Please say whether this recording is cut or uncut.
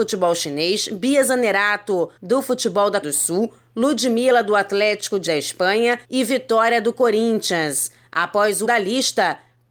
cut